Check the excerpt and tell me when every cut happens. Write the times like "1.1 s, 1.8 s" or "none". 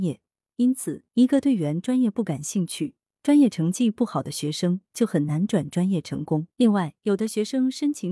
1.1 s, 6.5 s, 7.0 s